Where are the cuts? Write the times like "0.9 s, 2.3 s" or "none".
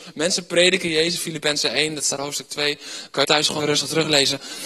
1.2 s, 2.2 s, 3.2 s, 3.6 s